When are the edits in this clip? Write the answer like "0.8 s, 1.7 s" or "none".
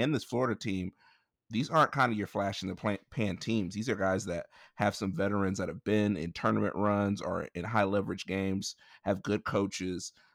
1.4 s